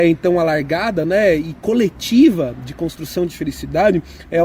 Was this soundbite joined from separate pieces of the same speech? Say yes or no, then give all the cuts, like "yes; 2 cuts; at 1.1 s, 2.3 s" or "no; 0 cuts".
no; 0 cuts